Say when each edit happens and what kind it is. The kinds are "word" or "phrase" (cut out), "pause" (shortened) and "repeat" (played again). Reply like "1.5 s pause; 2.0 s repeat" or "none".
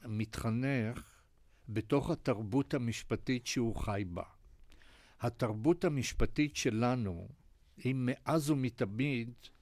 none